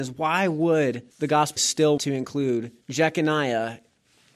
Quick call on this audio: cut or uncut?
cut